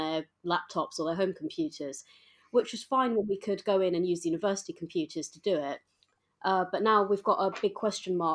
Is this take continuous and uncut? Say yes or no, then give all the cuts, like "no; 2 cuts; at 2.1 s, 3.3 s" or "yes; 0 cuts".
yes; 0 cuts